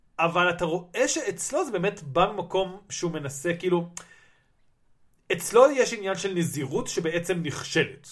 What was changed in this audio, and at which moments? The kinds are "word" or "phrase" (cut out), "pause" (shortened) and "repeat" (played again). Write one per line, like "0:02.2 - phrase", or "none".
none